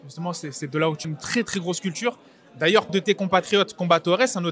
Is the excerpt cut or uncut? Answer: cut